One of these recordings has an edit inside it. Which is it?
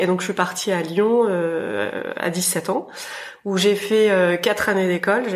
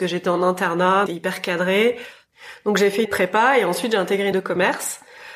second; 3 cuts; at 1.1 s, 3.1 s, 4.3 s

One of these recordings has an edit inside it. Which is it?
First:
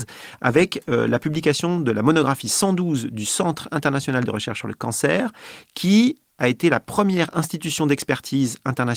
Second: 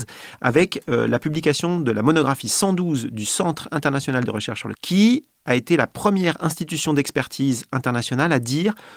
second; 1 cut; at 4.7 s

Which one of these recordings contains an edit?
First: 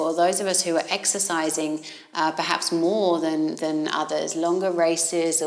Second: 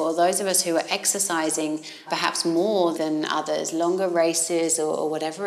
second; 2 cuts; at 2.1 s, 2.9 s

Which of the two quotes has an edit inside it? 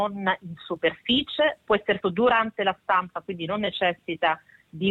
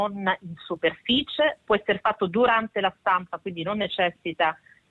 first; 1 cut; at 2.0 s

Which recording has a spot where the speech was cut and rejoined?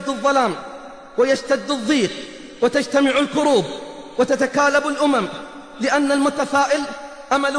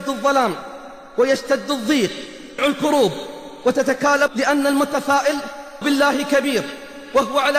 second; 3 cuts; at 2.6 s, 4.3 s, 5.8 s

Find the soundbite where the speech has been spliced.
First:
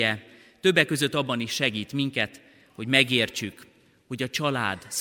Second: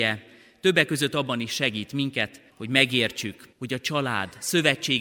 second; 2 cuts; at 2.5 s, 3.5 s

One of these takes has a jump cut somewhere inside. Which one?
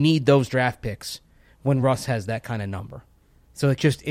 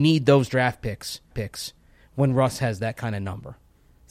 second; 1 cut; at 1.3 s

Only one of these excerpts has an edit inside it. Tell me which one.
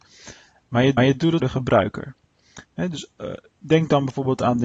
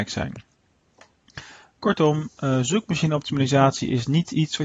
first; 3 cuts; at 1.0 s, 1.4 s, 2.6 s

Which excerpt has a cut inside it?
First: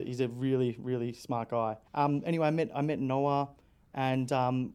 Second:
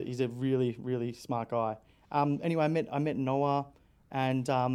first; 1 cut; at 1.9 s

